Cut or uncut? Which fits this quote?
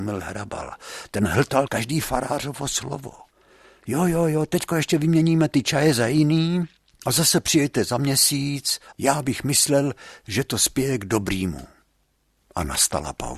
uncut